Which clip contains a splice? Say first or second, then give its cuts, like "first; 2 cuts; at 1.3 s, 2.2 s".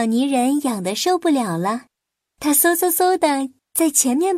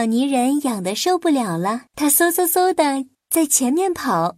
second; 1 cut; at 1.9 s